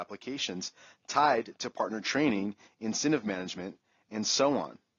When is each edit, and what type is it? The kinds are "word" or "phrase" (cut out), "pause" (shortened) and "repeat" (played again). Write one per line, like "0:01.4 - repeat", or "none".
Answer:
none